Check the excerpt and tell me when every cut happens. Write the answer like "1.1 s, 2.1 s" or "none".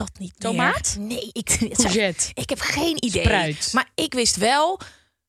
1.4 s